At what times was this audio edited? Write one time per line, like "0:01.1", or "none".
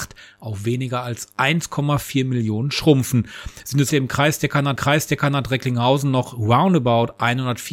0:03.9
0:04.8